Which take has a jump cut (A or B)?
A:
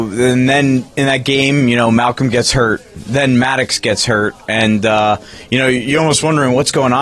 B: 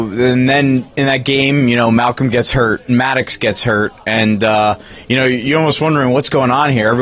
B